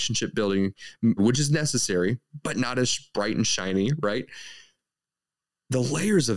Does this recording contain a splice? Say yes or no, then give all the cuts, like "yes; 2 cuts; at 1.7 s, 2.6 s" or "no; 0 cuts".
yes; 1 cut; at 1.2 s